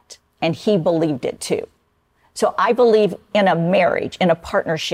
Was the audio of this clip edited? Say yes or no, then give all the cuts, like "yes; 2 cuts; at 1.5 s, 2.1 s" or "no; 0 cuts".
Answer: no; 0 cuts